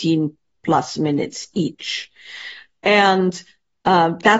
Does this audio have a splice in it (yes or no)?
no